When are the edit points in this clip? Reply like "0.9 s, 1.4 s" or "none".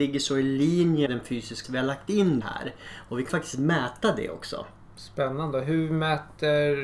1.1 s, 1.6 s, 2.4 s, 3.3 s